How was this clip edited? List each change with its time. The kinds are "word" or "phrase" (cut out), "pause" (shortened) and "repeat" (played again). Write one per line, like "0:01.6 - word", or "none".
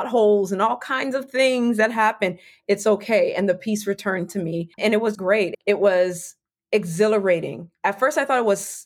0:04.7 - pause
0:05.1 - word